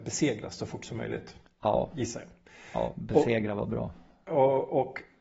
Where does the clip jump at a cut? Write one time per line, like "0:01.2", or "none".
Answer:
none